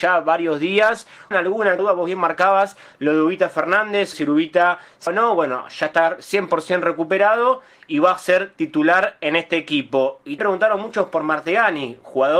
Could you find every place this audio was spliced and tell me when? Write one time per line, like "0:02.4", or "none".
0:01.3
0:01.8
0:04.1
0:05.1
0:10.4